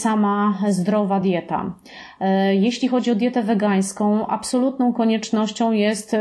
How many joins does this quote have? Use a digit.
0